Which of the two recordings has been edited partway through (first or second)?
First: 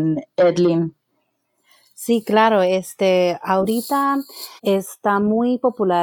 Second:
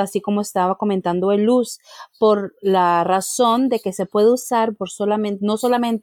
first